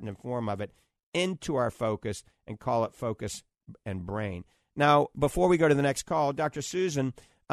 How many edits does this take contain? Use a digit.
0